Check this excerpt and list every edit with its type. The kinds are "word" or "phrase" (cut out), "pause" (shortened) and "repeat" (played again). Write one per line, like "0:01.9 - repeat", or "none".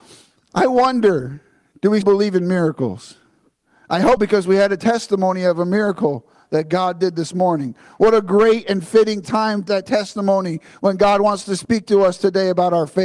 0:02.0 - word
0:04.2 - word
0:09.7 - word